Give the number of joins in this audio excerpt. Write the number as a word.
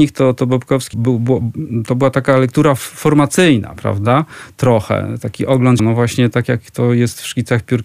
two